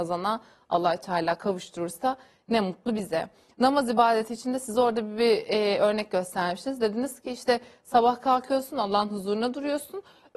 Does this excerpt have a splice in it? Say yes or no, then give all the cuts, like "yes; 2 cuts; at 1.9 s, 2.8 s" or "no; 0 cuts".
no; 0 cuts